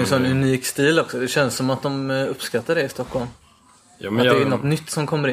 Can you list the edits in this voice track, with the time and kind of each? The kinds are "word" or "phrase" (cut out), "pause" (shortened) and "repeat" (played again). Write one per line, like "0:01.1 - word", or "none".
none